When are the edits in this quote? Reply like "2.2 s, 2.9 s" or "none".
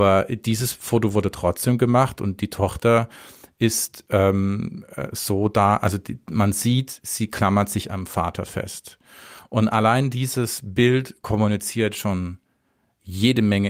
none